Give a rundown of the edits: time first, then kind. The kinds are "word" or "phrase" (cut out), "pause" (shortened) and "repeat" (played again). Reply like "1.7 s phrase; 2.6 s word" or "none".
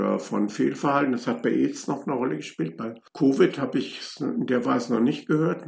none